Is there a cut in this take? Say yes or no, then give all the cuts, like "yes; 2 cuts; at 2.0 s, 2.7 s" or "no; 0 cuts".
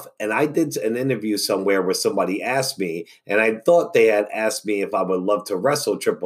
no; 0 cuts